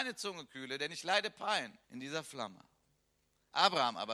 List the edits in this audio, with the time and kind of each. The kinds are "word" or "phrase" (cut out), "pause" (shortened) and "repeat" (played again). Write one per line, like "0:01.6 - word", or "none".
0:01.8 - pause